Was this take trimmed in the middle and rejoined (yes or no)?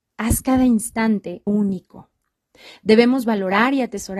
yes